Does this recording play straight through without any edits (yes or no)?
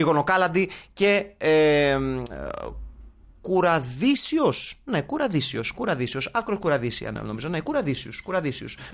yes